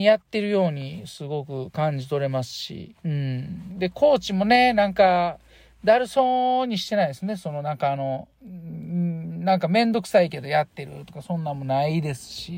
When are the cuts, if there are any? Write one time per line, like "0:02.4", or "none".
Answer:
0:03.0